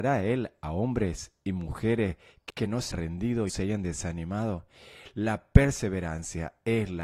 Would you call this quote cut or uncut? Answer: cut